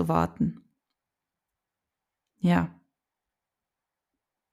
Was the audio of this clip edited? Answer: no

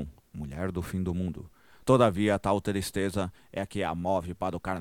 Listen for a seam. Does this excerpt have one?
no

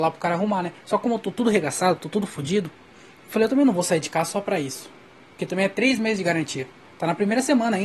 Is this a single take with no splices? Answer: yes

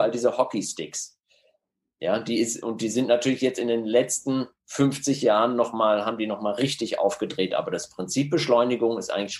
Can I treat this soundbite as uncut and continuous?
yes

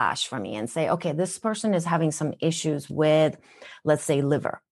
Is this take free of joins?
yes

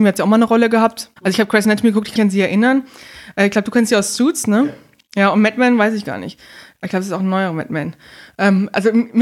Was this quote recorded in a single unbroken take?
no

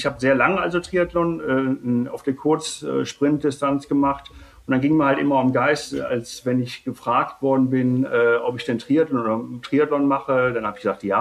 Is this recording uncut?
yes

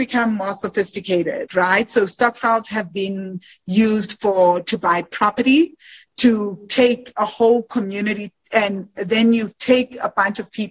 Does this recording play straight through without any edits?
yes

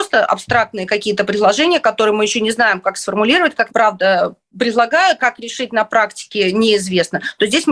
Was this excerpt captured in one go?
no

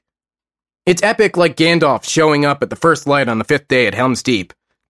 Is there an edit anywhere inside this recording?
no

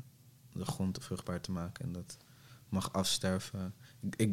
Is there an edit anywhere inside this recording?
yes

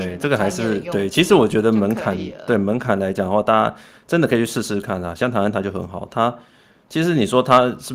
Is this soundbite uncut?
yes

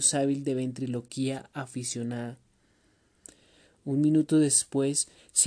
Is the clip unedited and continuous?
yes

